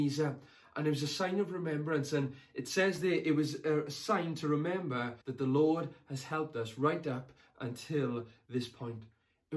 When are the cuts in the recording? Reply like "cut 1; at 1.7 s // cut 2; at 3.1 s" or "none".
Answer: cut 1; at 5.2 s